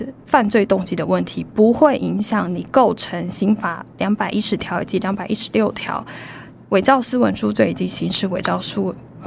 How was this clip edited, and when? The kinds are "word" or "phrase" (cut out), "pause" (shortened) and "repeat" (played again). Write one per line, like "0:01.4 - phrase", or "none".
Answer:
none